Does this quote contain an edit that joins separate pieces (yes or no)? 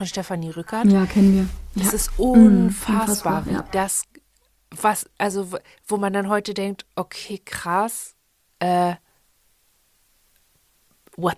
no